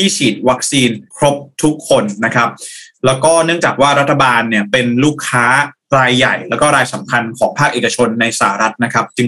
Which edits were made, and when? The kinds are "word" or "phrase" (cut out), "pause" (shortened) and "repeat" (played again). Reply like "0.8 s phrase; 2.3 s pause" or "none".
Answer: 1.1 s pause